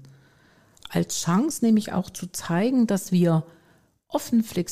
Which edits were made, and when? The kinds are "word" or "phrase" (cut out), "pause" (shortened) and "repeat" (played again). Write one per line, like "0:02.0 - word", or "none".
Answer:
none